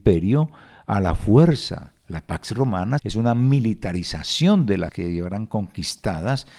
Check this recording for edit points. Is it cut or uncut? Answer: cut